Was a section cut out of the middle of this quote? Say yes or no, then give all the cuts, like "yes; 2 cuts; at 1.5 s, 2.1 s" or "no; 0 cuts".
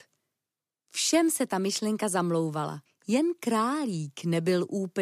yes; 1 cut; at 2.9 s